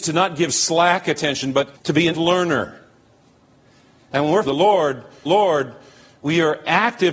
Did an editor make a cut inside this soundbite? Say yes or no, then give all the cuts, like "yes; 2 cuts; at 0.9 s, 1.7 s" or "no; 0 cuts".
yes; 4 cuts; at 1.8 s, 2.1 s, 4.4 s, 5.3 s